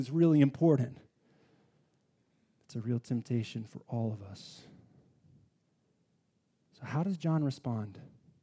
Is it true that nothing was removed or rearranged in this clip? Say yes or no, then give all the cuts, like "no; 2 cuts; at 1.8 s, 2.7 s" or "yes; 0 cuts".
yes; 0 cuts